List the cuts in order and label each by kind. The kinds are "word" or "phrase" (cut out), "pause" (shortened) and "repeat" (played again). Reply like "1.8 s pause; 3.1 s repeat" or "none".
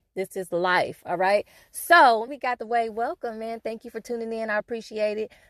2.3 s phrase; 2.6 s phrase; 4.6 s word